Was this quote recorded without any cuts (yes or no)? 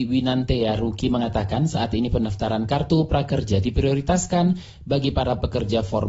yes